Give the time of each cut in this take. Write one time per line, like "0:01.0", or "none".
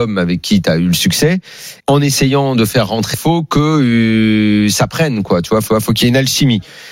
0:01.8
0:03.1
0:05.7